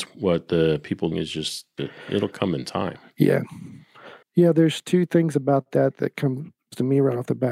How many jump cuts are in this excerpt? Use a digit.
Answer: 3